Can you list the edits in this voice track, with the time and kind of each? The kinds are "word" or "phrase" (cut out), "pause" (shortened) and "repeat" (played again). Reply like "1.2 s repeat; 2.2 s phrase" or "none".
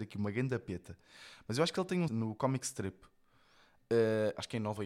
2.1 s word

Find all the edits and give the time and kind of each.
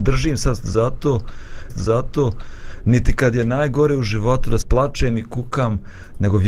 1.7 s repeat; 4.6 s word

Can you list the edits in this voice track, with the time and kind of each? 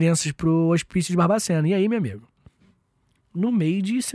none

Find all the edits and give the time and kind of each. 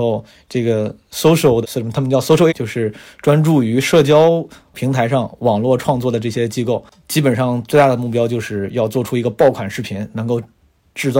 1.6 s word; 2.5 s word

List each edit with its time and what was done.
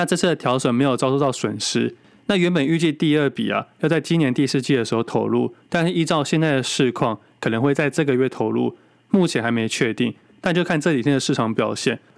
none

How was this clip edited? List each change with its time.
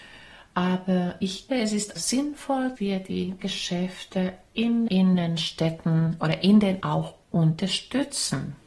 1.5 s word; 2.0 s word; 2.8 s word; 3.4 s word; 4.9 s word; 6.8 s word

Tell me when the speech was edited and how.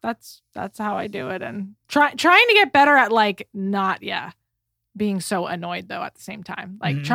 none

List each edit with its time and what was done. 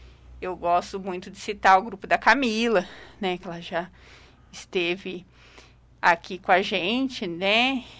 none

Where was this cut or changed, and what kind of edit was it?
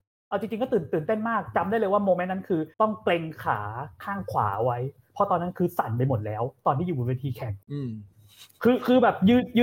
2.7 s pause; 7.6 s pause

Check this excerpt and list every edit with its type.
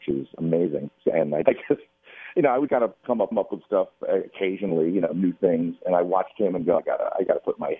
1.5 s word; 2.7 s word; 3.3 s repeat; 6.8 s word

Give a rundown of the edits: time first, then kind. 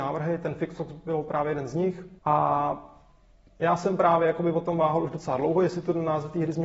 2.2 s pause

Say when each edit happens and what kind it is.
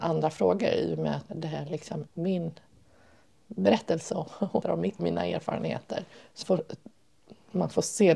1.3 s word; 2.1 s word; 4.6 s word; 5.0 s phrase; 6.4 s phrase

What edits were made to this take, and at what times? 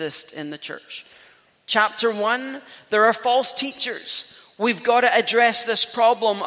none

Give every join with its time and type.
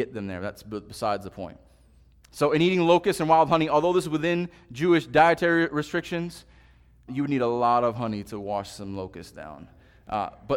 7.1 s word

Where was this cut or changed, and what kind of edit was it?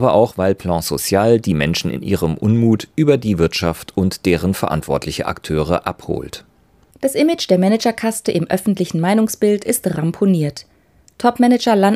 none

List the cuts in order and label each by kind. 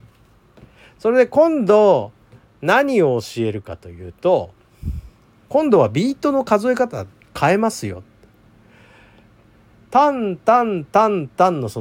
none

